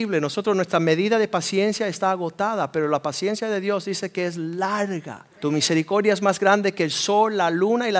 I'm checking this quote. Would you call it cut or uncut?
cut